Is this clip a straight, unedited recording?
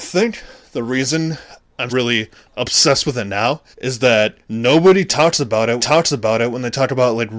no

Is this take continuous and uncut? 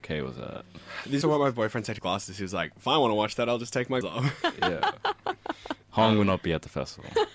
no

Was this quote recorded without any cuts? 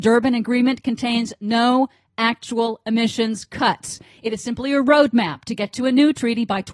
yes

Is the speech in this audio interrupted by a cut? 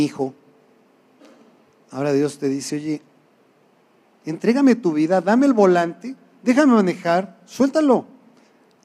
no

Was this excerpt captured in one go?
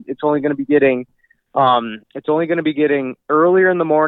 no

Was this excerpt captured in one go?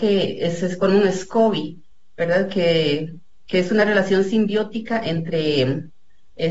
yes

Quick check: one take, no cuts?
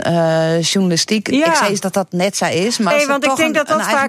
no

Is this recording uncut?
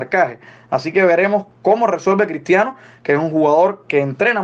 yes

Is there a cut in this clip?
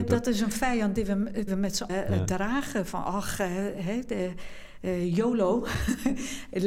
yes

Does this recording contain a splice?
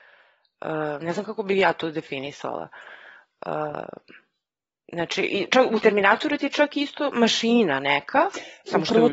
no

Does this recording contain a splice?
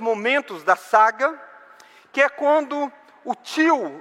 no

